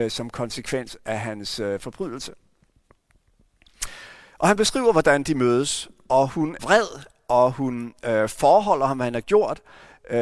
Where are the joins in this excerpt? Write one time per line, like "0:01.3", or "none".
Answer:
0:06.6